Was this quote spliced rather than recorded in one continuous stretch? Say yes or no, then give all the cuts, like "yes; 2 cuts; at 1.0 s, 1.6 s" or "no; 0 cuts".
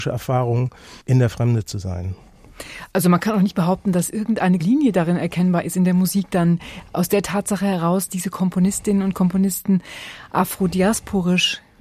yes; 3 cuts; at 1.0 s, 4.6 s, 8.1 s